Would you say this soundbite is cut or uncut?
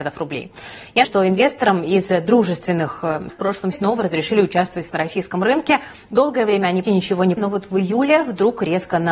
cut